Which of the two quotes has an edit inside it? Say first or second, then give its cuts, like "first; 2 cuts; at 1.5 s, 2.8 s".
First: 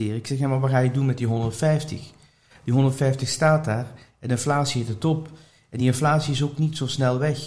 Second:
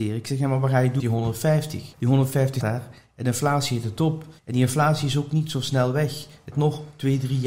second; 5 cuts; at 1.0 s, 1.9 s, 2.6 s, 4.4 s, 6.5 s